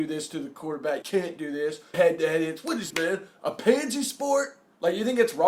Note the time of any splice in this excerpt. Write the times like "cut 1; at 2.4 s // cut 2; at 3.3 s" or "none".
cut 1; at 1.0 s // cut 2; at 1.9 s // cut 3; at 2.9 s // cut 4; at 3.4 s

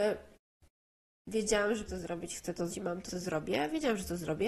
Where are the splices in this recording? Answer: cut 1; at 1.9 s // cut 2; at 2.7 s // cut 3; at 3.1 s

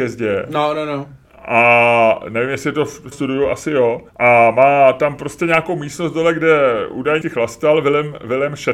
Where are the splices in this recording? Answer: cut 1; at 1.2 s // cut 2; at 3.1 s // cut 3; at 4.1 s // cut 4; at 7.2 s

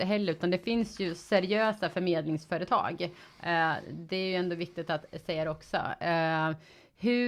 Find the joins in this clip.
none

